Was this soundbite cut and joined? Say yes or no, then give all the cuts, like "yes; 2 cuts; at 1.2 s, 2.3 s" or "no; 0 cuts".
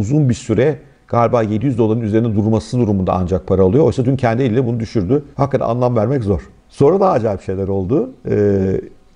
yes; 2 cuts; at 5.3 s, 6.6 s